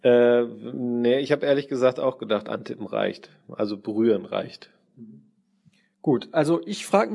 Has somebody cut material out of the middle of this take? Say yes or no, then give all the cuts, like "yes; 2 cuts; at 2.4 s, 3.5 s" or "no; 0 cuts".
no; 0 cuts